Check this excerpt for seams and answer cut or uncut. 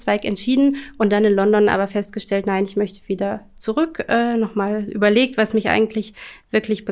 uncut